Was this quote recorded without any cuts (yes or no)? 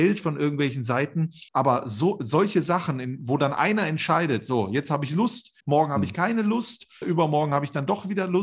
no